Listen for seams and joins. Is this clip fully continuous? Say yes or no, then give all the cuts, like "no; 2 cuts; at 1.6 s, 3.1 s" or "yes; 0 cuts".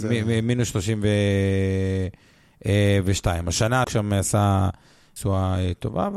no; 1 cut; at 3.8 s